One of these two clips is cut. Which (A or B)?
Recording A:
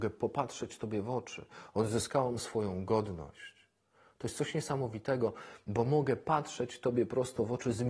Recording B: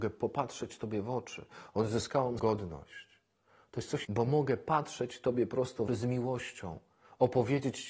B